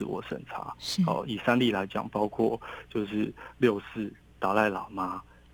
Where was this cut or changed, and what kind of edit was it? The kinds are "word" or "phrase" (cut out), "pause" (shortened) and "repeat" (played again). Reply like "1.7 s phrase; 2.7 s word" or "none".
none